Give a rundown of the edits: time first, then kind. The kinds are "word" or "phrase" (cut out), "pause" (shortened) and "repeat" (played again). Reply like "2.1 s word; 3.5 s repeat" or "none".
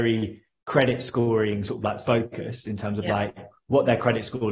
none